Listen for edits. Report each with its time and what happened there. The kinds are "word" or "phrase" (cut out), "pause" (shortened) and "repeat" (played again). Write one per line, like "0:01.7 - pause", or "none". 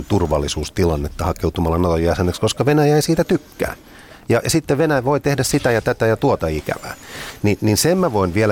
none